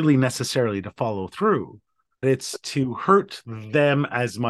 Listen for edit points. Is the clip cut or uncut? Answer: cut